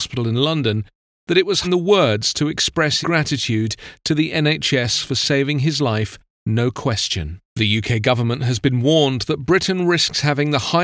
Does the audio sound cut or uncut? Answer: cut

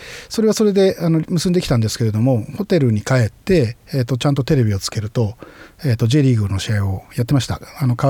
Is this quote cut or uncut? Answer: uncut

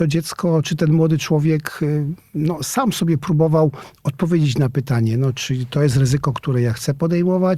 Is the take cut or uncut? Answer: uncut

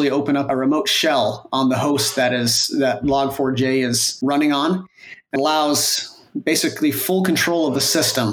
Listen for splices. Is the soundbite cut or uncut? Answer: cut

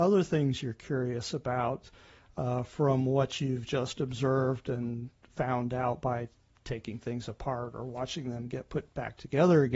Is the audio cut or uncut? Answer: uncut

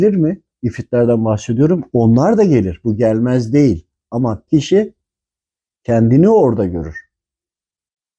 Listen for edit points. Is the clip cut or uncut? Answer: cut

